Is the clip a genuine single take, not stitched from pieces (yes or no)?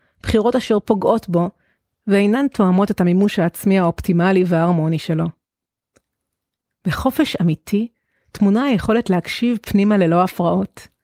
yes